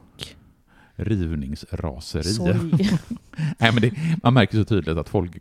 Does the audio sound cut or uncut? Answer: uncut